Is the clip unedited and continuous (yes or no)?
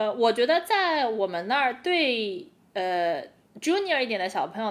no